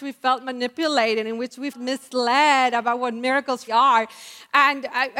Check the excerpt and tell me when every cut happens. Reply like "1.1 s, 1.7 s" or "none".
1.7 s, 3.7 s